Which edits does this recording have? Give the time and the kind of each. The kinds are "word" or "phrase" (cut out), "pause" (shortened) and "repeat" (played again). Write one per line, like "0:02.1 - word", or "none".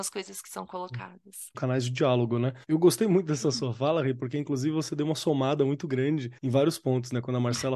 0:01.5 - phrase
0:02.6 - pause
0:06.4 - pause